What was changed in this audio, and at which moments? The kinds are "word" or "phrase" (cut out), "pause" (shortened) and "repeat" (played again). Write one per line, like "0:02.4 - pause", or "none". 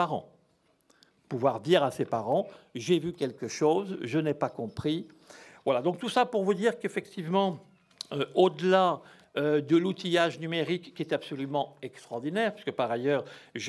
none